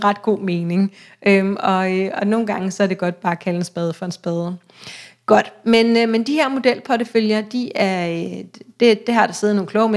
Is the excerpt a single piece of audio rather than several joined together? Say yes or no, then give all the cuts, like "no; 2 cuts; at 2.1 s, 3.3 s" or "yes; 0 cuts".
yes; 0 cuts